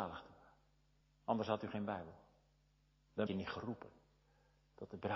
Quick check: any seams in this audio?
yes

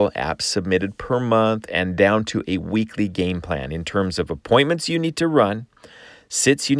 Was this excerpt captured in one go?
yes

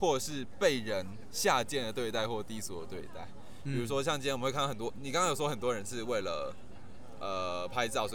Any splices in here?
no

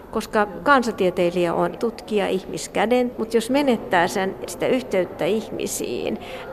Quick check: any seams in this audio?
yes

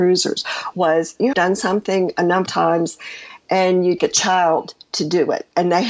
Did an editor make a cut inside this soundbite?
yes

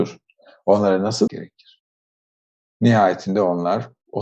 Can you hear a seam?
yes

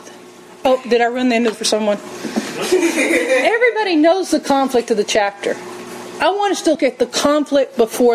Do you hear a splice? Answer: yes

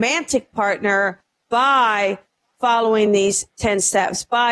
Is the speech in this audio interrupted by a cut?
no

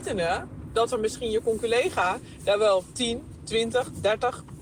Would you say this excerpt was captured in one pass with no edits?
yes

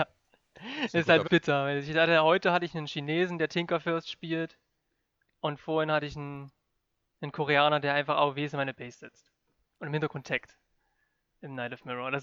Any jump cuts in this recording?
yes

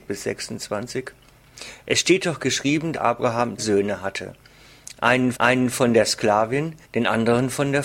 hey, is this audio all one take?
no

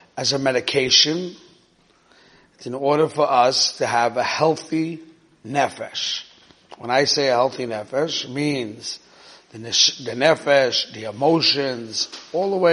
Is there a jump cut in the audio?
no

